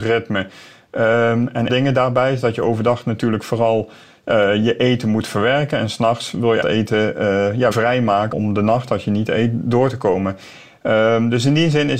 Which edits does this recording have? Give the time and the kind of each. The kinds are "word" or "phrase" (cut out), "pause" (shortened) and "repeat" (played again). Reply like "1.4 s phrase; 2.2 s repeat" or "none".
1.7 s phrase; 6.6 s word; 7.7 s word; 8.3 s word